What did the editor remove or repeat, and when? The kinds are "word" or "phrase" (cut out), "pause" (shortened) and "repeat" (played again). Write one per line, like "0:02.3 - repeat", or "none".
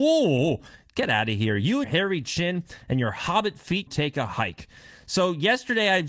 0:01.8 - word
0:03.9 - phrase